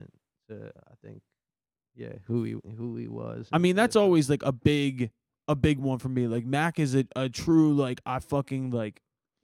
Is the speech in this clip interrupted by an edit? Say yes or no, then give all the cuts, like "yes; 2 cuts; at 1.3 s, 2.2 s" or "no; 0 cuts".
no; 0 cuts